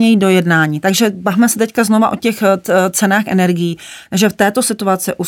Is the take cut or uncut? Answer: uncut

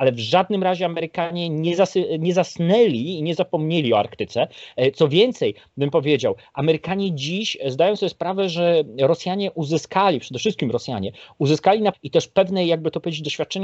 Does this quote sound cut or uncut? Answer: cut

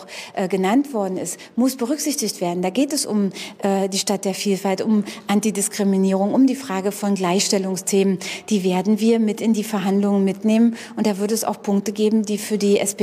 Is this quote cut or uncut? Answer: uncut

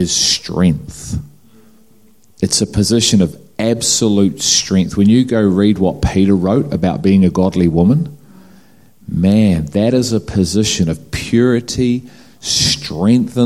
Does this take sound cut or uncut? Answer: uncut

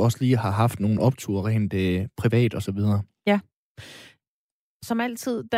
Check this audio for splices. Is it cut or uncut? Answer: uncut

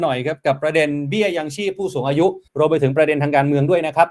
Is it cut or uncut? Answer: cut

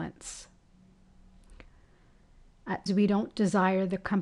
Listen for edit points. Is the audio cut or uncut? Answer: cut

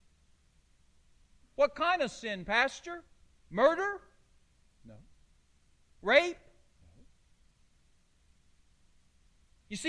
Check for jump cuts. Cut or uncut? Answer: uncut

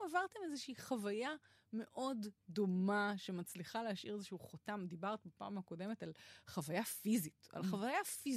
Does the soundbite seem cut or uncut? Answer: uncut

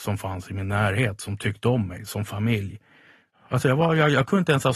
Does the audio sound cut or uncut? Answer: uncut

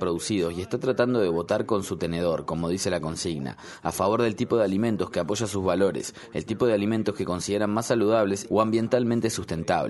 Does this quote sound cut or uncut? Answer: uncut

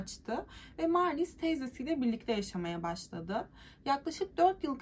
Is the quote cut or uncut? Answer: uncut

